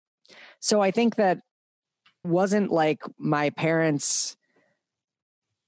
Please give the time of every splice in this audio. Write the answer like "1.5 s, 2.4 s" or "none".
2.2 s